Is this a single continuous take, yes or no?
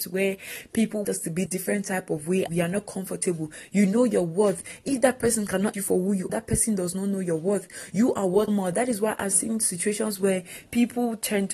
no